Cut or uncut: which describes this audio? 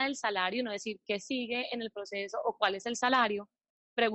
uncut